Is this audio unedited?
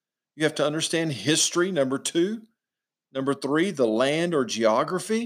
yes; 0 cuts

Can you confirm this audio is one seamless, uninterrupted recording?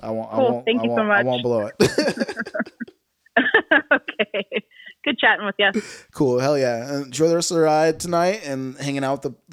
yes; 0 cuts

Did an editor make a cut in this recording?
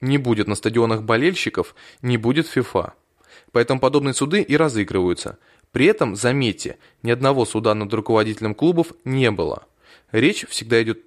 no; 0 cuts

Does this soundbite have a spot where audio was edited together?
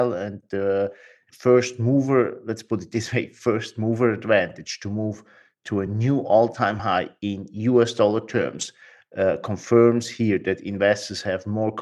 no; 0 cuts

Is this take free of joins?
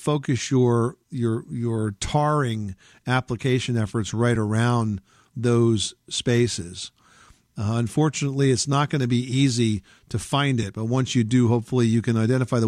yes; 0 cuts

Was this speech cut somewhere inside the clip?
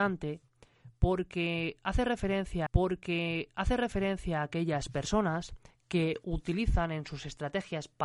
yes; 1 cut; at 2.7 s

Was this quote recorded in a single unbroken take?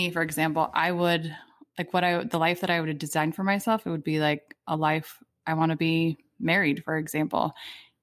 yes; 0 cuts

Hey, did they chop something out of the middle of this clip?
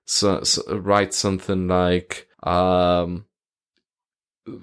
yes; 1 cut; at 2.3 s

